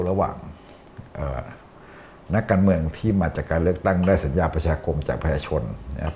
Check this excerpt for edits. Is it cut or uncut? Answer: uncut